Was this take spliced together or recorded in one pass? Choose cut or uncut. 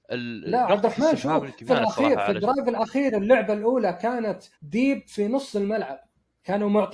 cut